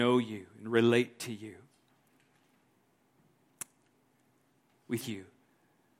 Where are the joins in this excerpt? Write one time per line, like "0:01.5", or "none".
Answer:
0:05.0